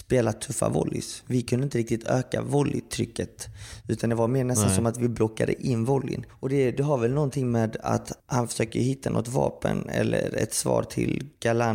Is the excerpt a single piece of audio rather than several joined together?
no; 1 cut; at 8.2 s

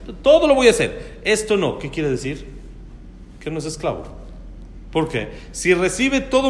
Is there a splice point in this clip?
no; 0 cuts

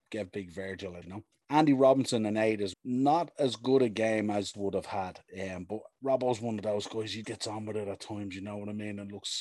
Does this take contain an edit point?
yes; 5 cuts; at 1.0 s, 1.3 s, 2.7 s, 4.5 s, 7.2 s

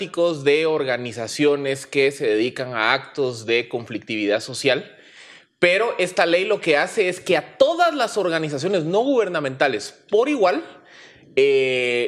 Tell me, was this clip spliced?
no; 0 cuts

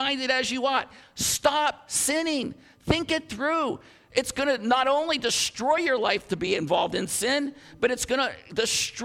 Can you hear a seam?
no; 0 cuts

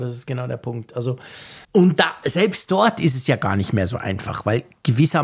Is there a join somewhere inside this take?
yes; 1 cut; at 1.6 s

